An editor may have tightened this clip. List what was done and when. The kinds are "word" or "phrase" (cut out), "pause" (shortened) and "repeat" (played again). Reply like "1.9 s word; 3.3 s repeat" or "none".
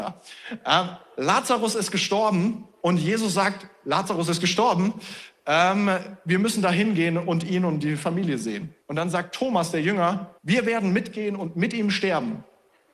8.8 s pause; 10.4 s pause